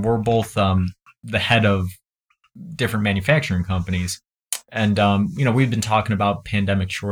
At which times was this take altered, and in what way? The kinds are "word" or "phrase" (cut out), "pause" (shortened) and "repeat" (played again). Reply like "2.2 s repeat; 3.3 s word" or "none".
none